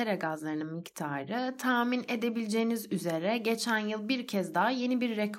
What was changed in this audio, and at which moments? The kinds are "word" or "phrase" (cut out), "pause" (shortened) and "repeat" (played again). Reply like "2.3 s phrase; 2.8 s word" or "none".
none